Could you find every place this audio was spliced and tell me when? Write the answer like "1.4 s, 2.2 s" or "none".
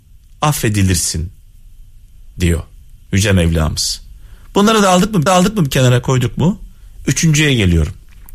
5.3 s